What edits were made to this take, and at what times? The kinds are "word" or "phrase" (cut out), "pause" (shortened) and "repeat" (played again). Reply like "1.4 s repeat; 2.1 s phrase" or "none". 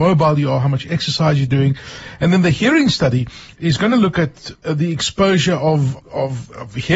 6.0 s word